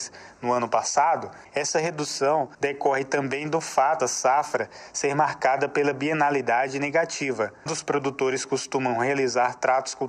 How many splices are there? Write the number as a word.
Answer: two